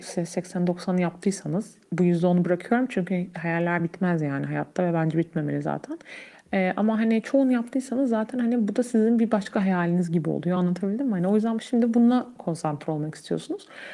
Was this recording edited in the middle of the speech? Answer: no; 0 cuts

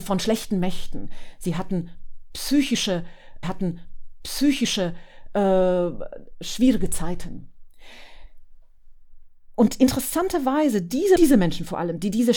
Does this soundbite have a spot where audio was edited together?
yes; 2 cuts; at 3.4 s, 11.2 s

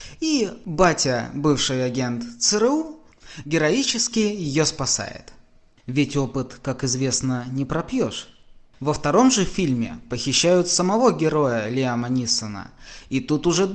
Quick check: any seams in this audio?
no; 0 cuts

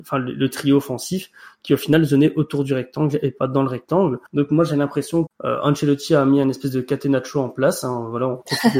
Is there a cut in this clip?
yes; 2 cuts; at 4.3 s, 5.3 s

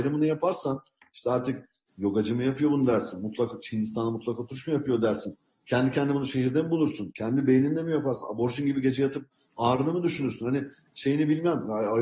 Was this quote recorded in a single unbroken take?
yes; 0 cuts

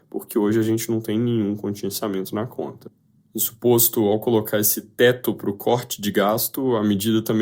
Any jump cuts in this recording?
no; 0 cuts

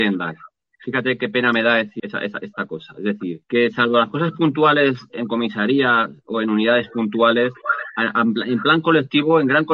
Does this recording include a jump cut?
yes; 2 cuts; at 2.0 s, 3.4 s

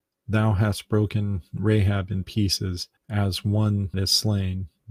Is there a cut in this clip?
yes; 2 cuts; at 3.0 s, 3.9 s

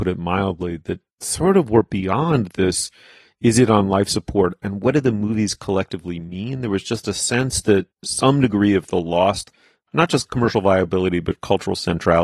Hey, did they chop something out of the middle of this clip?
no; 0 cuts

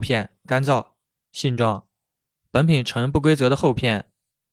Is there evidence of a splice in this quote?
no; 0 cuts

